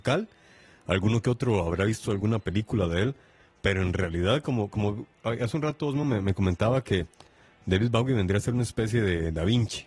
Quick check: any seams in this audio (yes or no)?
no